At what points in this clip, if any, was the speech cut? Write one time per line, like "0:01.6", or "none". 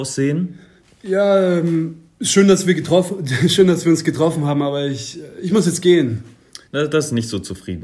0:06.7